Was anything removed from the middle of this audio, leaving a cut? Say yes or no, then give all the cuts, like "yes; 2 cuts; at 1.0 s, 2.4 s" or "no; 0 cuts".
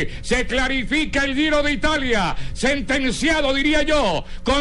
no; 0 cuts